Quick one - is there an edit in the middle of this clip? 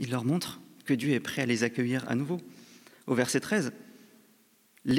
no; 0 cuts

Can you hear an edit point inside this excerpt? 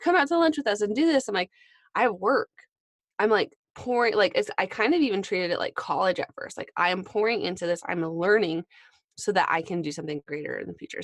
no; 0 cuts

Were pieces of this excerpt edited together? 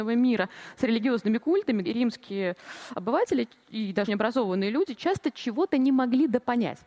yes; 2 cuts; at 1.8 s, 4.1 s

